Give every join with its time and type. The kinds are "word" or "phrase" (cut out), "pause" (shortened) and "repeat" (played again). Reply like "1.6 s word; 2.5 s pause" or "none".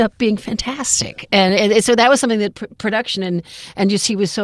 none

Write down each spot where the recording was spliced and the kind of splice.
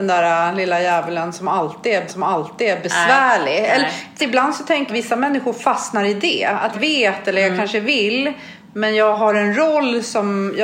2.1 s repeat; 4.2 s word; 4.9 s word; 6.7 s phrase

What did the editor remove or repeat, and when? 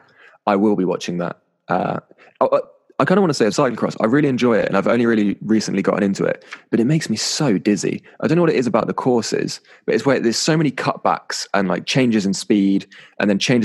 3.5 s phrase

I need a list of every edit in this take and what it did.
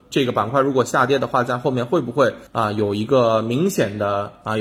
2.5 s pause

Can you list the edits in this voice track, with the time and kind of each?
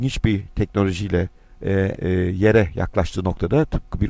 1.4 s word; 1.9 s word

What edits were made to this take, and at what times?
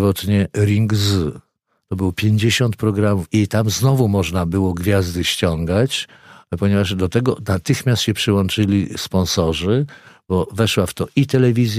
none

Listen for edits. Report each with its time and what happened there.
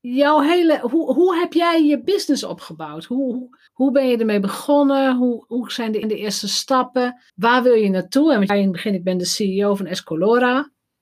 3.7 s pause; 6.0 s repeat; 7.3 s pause; 8.5 s phrase

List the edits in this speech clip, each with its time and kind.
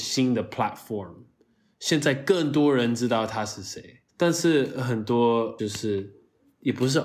4.1 s pause; 5.6 s word

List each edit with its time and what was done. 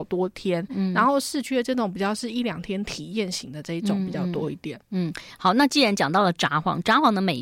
none

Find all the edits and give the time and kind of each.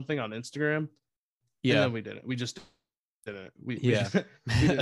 none

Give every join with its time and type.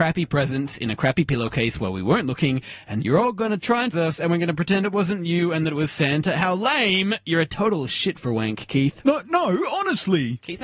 3.0 s word; 3.9 s word

